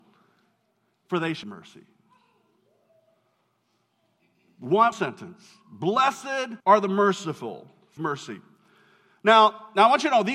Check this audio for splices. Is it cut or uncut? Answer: cut